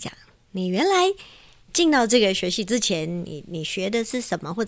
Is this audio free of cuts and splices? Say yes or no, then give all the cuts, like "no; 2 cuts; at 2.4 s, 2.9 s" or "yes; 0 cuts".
yes; 0 cuts